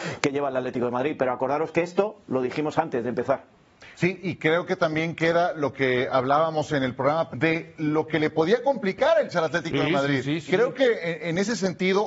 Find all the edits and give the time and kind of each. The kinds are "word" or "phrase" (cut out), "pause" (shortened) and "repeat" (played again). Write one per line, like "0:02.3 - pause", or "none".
0:07.3 - word
0:09.3 - word
0:10.5 - word